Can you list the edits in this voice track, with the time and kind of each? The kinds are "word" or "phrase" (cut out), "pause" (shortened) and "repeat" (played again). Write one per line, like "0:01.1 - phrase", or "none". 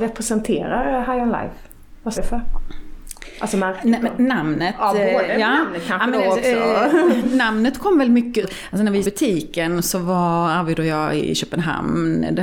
0:02.1 - word
0:08.4 - word
0:09.0 - word